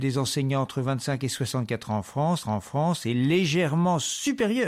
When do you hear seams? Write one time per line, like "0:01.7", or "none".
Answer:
0:02.4

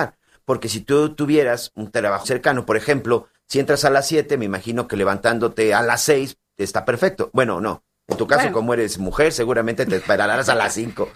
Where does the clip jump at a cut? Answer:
0:02.2

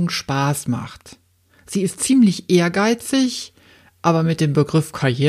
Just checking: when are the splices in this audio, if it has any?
none

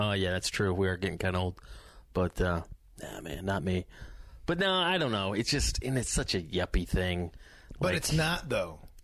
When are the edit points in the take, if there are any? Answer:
none

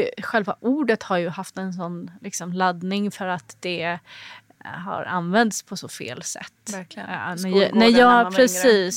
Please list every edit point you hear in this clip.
none

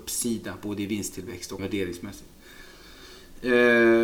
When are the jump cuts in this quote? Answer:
0:01.6

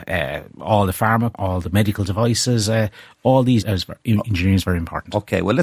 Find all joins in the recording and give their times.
0:01.3
0:03.6

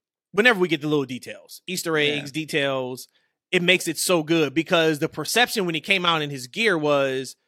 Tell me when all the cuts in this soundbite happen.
none

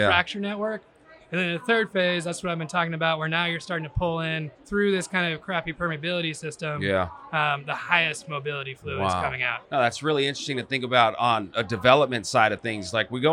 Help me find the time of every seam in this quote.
0:04.6
0:09.6

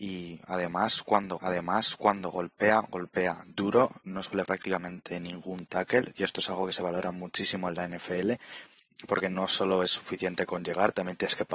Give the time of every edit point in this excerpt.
0:01.4
0:04.5

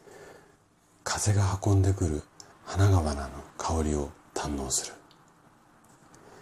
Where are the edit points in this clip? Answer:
0:02.5
0:03.5

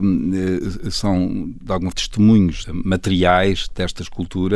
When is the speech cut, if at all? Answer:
0:01.9
0:02.6

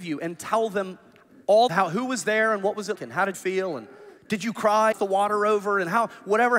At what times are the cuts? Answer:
0:01.7
0:02.9
0:03.3
0:04.2
0:04.9

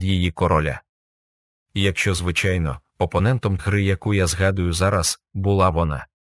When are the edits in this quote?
0:03.6

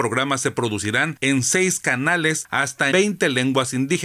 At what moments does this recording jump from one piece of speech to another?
0:02.9

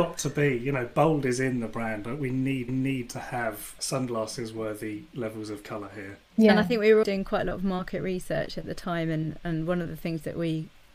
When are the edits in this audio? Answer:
0:02.7
0:03.8
0:06.3
0:07.0

